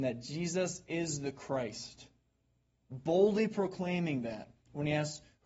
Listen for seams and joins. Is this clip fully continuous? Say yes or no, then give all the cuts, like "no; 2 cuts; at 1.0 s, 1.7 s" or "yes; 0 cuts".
yes; 0 cuts